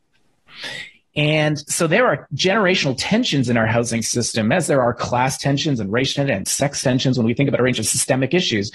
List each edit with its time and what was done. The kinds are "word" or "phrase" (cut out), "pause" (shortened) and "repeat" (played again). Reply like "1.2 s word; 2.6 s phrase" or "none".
none